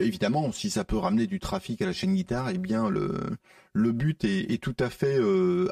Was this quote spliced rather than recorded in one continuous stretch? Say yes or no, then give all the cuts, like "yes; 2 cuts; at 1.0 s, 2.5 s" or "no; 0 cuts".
no; 0 cuts